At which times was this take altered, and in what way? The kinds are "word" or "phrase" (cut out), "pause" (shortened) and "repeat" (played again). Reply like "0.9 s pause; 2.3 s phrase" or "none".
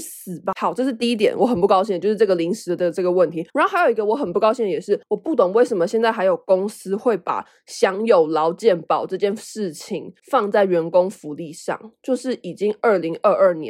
3.5 s pause; 5.0 s pause; 10.2 s pause